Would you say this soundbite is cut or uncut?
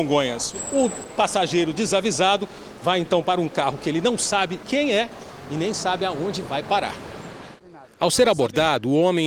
cut